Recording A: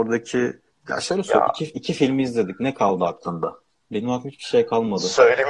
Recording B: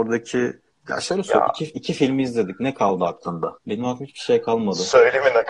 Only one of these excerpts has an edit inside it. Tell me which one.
B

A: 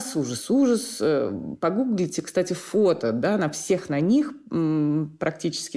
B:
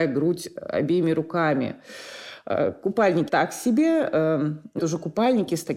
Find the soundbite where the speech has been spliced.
B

